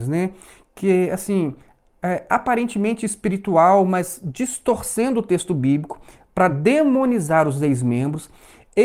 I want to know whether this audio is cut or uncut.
uncut